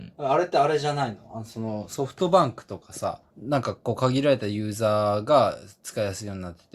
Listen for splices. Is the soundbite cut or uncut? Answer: cut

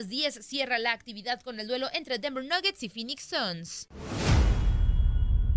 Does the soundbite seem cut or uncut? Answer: uncut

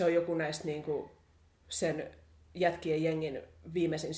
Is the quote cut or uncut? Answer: uncut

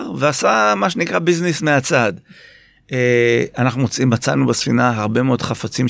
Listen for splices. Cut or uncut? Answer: uncut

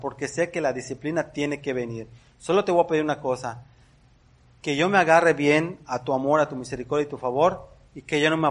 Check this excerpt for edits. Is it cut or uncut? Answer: uncut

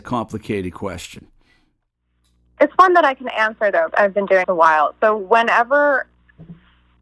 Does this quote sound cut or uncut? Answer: cut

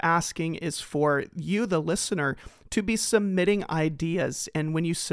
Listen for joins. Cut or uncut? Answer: uncut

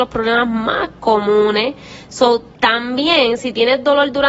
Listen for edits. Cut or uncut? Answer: cut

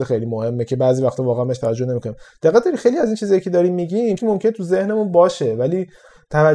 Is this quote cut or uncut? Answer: cut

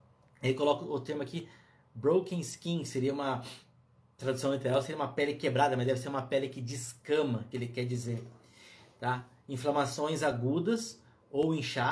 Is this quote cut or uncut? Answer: uncut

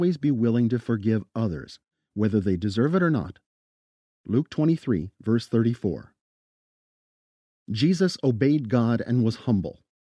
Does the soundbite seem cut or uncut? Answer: uncut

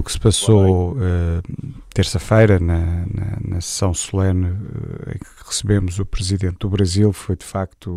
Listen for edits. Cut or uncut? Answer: uncut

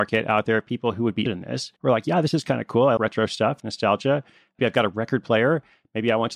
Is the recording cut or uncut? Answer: cut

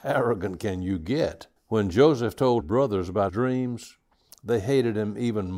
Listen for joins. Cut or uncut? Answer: cut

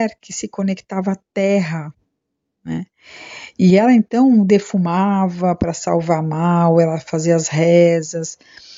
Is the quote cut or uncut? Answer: uncut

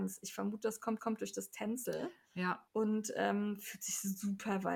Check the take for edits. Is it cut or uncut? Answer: cut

